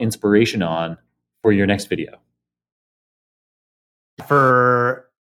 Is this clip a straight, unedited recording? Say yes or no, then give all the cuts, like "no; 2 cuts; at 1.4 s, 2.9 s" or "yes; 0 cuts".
yes; 0 cuts